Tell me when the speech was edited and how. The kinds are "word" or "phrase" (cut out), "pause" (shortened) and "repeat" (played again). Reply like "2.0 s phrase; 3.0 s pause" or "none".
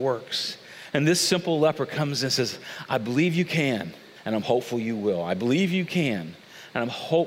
4.2 s pause